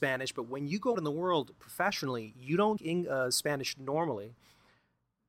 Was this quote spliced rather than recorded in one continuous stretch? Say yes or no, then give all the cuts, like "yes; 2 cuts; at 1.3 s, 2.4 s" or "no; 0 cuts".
yes; 2 cuts; at 0.9 s, 2.8 s